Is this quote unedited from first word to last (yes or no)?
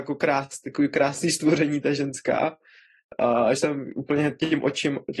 no